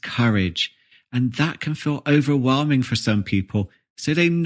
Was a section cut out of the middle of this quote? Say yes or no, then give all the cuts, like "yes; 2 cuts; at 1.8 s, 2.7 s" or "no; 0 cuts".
no; 0 cuts